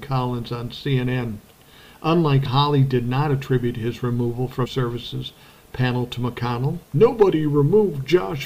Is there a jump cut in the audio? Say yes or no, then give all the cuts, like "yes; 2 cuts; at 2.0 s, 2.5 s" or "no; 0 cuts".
yes; 3 cuts; at 2.5 s, 4.7 s, 6.8 s